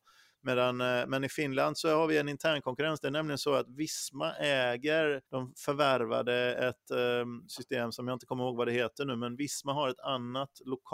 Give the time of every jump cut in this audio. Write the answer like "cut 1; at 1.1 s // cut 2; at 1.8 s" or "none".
cut 1; at 5.3 s